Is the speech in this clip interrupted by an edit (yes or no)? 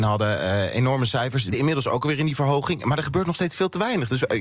yes